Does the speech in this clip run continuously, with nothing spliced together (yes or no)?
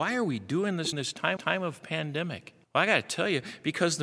no